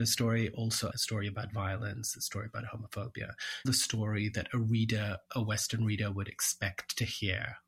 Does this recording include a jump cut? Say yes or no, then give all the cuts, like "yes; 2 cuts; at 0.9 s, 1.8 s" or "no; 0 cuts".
yes; 2 cuts; at 0.9 s, 3.6 s